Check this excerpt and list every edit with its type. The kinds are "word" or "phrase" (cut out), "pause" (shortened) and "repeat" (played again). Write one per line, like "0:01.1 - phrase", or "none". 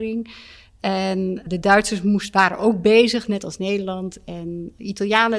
none